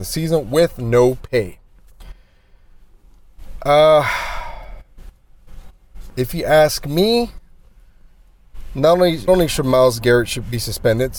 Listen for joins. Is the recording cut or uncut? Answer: cut